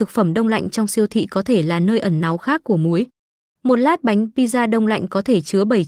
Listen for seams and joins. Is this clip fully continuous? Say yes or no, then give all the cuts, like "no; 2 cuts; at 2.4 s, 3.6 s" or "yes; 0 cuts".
yes; 0 cuts